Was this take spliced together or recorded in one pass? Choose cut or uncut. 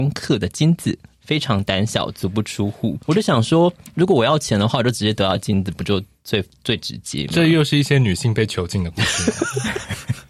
cut